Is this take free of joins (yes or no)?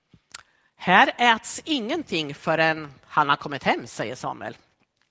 yes